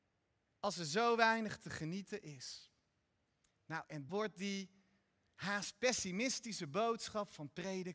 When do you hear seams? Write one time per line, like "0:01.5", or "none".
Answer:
0:03.3
0:04.1